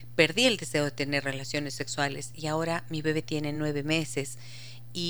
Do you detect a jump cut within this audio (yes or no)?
no